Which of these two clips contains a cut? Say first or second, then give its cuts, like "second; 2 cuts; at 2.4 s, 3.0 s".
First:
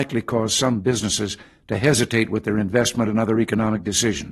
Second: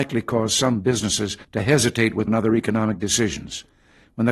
second; 2 cuts; at 1.4 s, 2.3 s